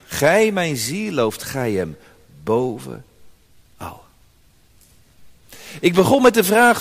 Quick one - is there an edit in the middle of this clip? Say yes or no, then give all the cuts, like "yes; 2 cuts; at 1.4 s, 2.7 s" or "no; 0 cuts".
no; 0 cuts